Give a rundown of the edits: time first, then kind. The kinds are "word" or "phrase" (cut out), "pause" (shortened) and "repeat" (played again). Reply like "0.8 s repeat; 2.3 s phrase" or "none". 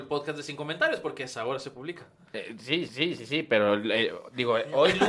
2.9 s repeat